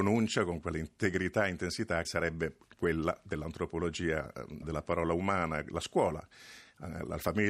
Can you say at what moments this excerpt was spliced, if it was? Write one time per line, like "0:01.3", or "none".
0:02.0
0:04.6